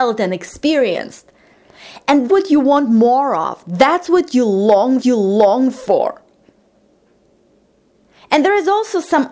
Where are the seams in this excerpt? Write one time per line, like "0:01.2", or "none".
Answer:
0:02.3
0:05.0